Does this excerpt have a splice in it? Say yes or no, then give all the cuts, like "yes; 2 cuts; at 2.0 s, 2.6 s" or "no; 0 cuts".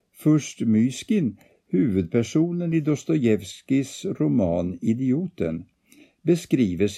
no; 0 cuts